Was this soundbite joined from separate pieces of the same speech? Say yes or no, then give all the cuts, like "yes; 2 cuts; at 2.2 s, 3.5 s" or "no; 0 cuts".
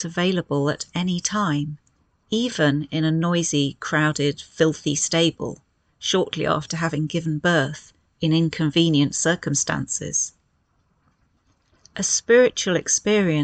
no; 0 cuts